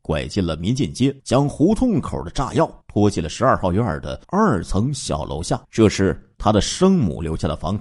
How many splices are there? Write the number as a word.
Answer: five